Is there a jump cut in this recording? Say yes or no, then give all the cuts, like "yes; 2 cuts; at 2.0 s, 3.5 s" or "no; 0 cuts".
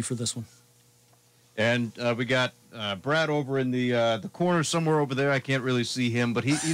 no; 0 cuts